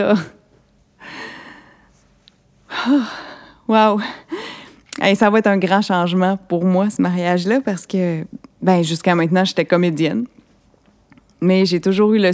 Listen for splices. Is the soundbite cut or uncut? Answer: uncut